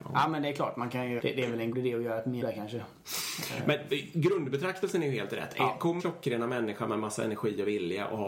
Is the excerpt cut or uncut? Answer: cut